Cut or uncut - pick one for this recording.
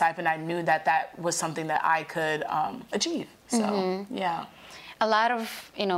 uncut